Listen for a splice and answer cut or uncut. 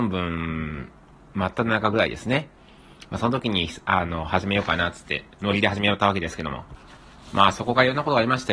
uncut